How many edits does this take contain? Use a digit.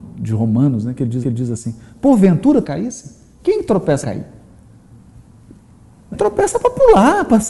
4